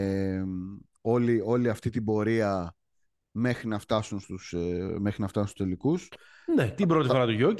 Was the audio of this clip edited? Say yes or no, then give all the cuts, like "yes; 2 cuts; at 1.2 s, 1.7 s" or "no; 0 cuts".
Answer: no; 0 cuts